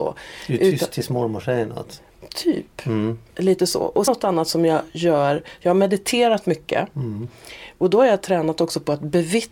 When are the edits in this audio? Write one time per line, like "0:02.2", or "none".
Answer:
0:04.1